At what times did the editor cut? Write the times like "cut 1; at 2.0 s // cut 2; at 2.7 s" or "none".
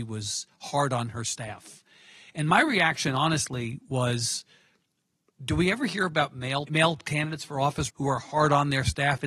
cut 1; at 6.7 s // cut 2; at 7.9 s